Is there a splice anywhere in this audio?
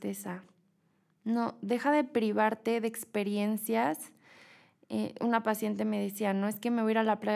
no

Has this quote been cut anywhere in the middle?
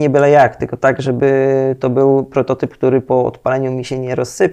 no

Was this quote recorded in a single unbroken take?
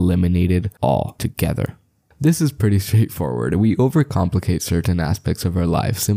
yes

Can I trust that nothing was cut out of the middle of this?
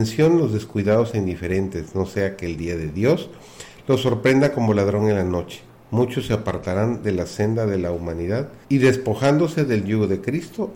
no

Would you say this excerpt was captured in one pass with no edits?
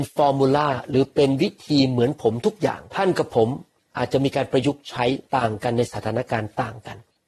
no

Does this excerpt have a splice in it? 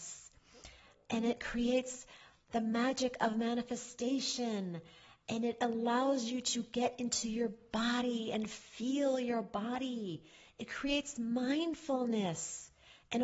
no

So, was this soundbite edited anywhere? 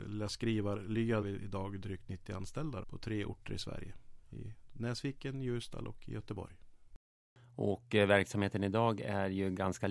yes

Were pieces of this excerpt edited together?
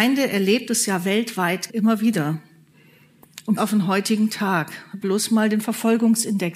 yes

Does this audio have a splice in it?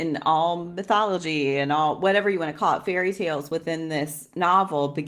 no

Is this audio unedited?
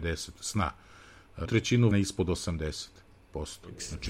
no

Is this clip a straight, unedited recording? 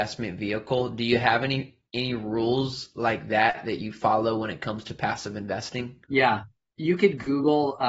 no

